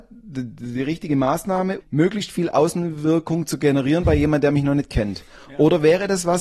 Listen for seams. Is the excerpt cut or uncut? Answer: cut